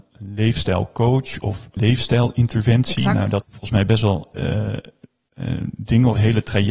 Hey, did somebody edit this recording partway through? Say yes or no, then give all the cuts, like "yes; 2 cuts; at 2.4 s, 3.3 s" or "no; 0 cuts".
yes; 3 cuts; at 1.8 s, 3.4 s, 4.3 s